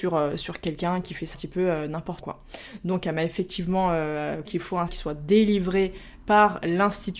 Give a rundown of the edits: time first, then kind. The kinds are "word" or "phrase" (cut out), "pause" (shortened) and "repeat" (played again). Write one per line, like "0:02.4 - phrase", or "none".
0:01.3 - word
0:02.2 - word
0:04.4 - word
0:04.9 - word